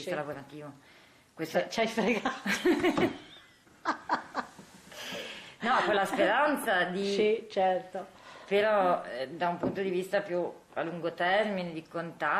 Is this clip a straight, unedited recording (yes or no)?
yes